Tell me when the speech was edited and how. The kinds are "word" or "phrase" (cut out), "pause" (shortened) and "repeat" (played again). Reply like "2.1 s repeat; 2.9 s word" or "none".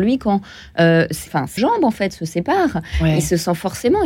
1.3 s word; 1.6 s word